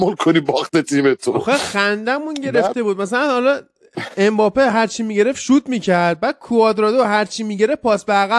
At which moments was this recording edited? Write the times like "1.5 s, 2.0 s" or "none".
none

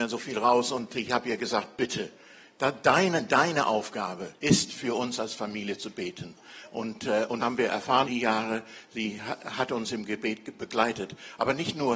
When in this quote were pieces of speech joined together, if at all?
4.4 s, 7.4 s, 8.0 s

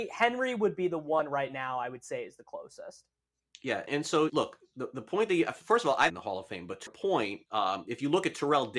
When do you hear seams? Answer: 3.9 s, 4.3 s, 6.1 s, 6.9 s, 7.5 s

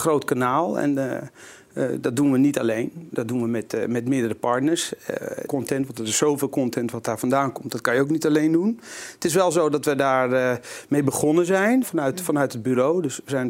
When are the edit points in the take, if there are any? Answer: 5.5 s, 11.8 s

